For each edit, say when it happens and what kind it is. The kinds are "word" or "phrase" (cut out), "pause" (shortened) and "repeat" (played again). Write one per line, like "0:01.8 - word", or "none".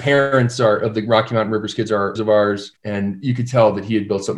0:02.1 - word
0:02.8 - pause